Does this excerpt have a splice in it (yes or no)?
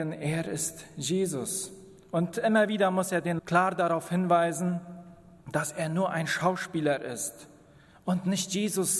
yes